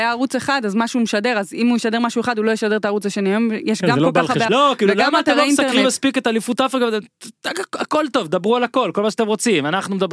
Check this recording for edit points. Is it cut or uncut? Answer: cut